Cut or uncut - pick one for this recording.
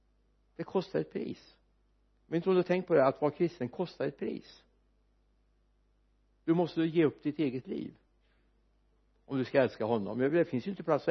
uncut